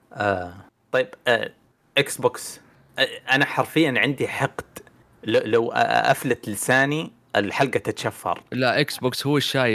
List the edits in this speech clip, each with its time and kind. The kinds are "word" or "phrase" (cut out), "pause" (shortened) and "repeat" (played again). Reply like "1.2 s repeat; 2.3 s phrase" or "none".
none